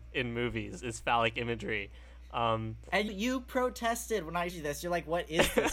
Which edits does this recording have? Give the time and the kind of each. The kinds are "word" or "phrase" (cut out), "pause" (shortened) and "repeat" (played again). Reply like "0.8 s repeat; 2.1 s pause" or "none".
3.1 s word; 4.5 s word